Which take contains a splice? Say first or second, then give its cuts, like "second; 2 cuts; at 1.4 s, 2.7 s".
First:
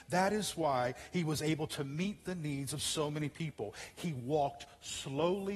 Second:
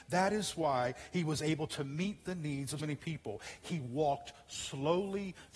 second; 1 cut; at 2.8 s